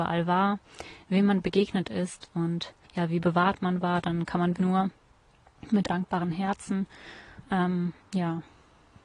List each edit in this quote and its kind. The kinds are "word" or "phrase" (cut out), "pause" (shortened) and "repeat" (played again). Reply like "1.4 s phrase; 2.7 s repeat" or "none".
2.8 s pause; 3.2 s phrase; 4.6 s word; 5.9 s word; 8.0 s pause